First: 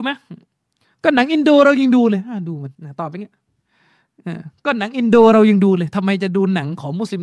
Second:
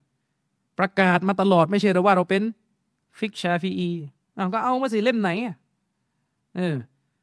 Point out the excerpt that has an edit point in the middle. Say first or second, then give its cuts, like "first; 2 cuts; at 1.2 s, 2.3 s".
first; 1 cut; at 2.7 s